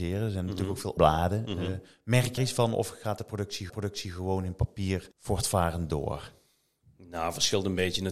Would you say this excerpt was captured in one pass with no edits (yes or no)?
no